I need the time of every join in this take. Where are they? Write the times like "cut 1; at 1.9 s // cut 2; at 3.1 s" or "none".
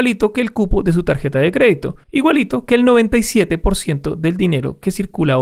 cut 1; at 2.0 s

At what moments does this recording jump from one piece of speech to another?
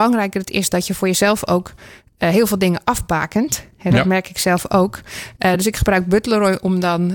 none

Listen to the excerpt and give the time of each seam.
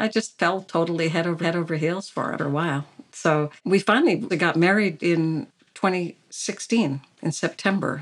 cut 1; at 1.4 s // cut 2; at 2.4 s // cut 3; at 3.6 s // cut 4; at 4.3 s // cut 5; at 5.0 s

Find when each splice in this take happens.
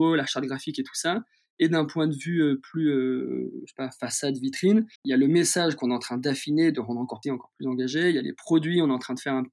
cut 1; at 5.0 s // cut 2; at 7.2 s

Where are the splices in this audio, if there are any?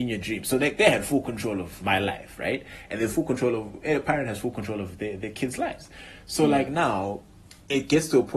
none

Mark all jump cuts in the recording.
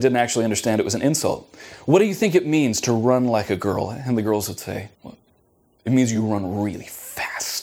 cut 1; at 4.9 s

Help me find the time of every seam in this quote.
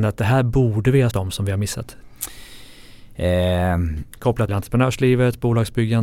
cut 1; at 1.1 s // cut 2; at 4.5 s

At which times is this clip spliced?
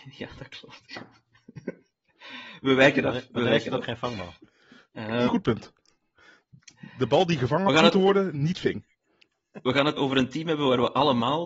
cut 1; at 5.3 s // cut 2; at 10.0 s

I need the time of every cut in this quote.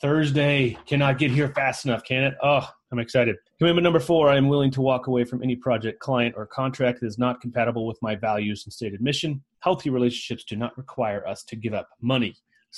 cut 1; at 3.5 s // cut 2; at 9.5 s

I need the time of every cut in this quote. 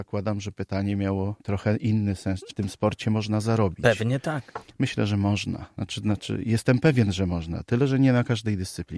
cut 1; at 1.4 s // cut 2; at 2.5 s

